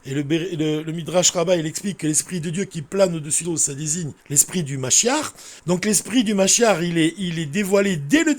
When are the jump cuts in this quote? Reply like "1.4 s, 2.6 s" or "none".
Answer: 3.4 s, 4.2 s, 5.6 s